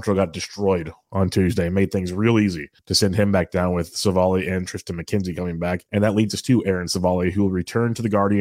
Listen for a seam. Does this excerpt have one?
yes; 2 cuts; at 2.8 s, 5.9 s

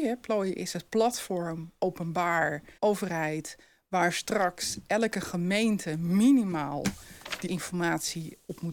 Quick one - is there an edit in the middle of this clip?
yes; 2 cuts; at 2.8 s, 7.5 s

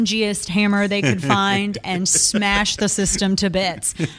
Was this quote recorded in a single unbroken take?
yes; 0 cuts

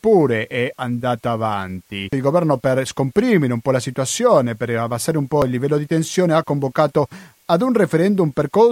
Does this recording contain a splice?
no; 0 cuts

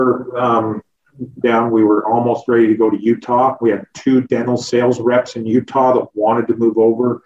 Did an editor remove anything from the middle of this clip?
yes; 1 cut; at 1.4 s

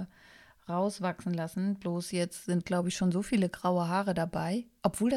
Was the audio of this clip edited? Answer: no; 0 cuts

